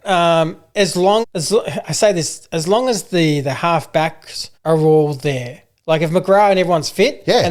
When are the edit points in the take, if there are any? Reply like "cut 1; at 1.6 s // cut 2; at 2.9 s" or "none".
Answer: cut 1; at 1.2 s // cut 2; at 4.5 s